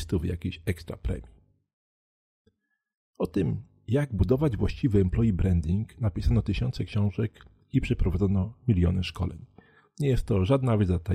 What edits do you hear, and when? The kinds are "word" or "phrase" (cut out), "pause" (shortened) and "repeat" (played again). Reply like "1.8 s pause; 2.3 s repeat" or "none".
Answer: none